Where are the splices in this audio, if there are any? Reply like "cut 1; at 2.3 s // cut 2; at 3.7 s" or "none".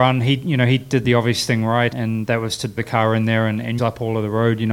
cut 1; at 1.9 s // cut 2; at 2.8 s // cut 3; at 3.8 s